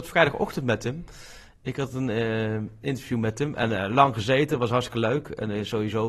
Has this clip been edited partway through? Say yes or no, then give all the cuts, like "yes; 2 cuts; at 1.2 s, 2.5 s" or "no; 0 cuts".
no; 0 cuts